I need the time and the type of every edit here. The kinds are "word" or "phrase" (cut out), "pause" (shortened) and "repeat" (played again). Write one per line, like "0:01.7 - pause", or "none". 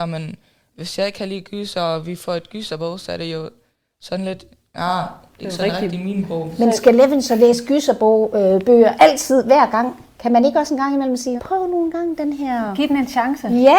0:11.4 - word